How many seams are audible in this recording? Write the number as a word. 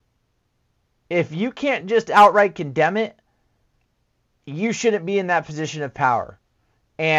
zero